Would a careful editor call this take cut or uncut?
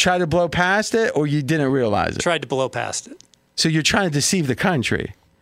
uncut